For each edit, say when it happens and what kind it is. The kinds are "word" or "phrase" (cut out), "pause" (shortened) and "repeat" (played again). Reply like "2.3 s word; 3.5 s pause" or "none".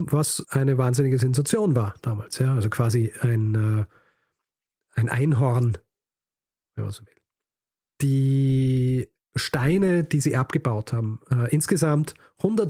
none